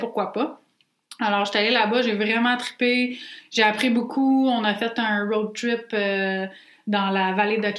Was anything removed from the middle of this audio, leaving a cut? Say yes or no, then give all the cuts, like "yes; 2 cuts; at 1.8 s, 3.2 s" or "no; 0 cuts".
no; 0 cuts